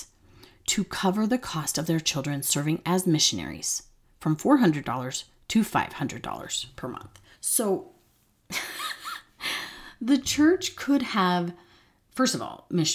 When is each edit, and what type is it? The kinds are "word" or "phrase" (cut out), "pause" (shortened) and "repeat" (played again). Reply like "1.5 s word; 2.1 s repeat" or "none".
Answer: 7.3 s pause